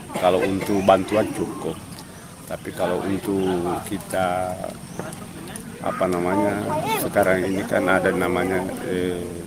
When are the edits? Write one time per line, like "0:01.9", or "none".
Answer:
none